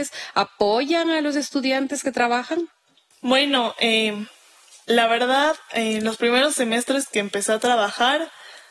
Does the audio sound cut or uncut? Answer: uncut